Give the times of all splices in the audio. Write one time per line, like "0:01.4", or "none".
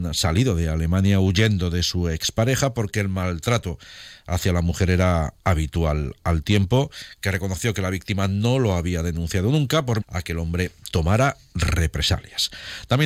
0:10.0

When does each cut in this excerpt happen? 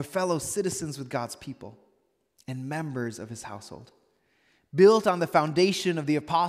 none

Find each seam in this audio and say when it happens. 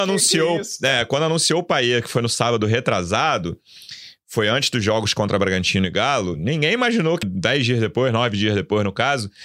0:07.2

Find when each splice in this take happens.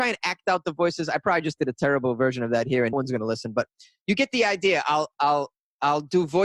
0:02.9

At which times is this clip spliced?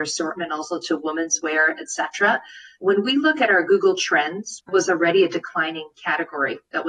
0:04.7

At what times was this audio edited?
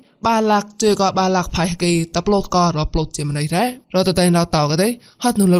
0:03.8

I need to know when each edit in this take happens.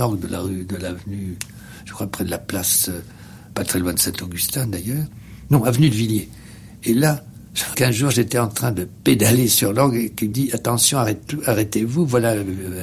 0:03.5
0:07.7
0:10.3

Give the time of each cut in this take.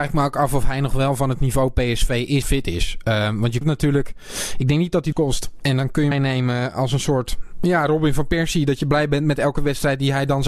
0:02.4
0:03.6
0:05.1
0:06.1

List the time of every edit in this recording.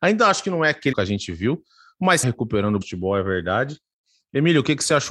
0:00.9
0:02.2
0:02.8

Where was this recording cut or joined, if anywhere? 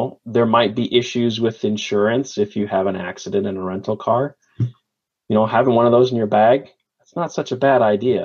none

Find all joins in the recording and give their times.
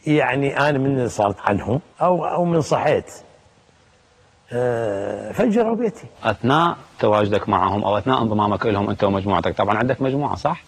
0:01.4
0:01.9
0:06.1

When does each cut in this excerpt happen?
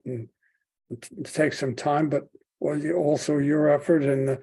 none

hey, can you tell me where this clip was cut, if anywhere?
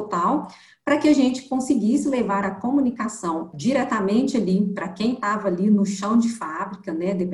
0:03.5

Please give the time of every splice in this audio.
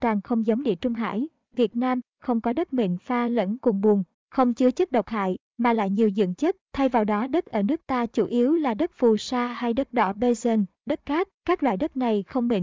0:06.6
0:11.3

